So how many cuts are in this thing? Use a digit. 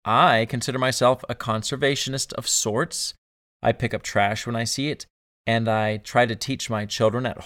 0